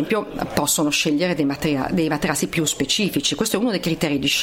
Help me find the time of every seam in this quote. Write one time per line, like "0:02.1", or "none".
none